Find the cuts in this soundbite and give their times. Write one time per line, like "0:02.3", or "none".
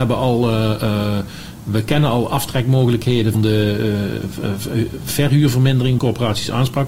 0:03.3
0:06.0